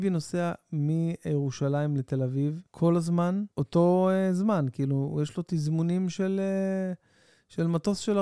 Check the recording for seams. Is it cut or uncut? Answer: cut